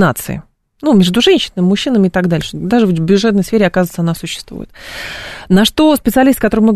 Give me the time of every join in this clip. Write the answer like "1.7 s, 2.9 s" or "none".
none